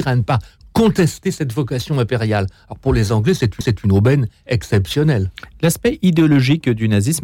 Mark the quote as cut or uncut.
cut